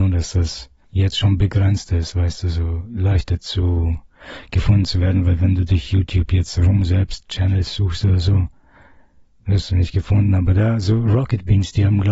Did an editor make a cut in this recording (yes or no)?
no